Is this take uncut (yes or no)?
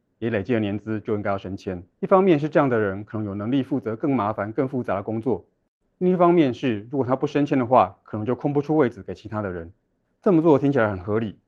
no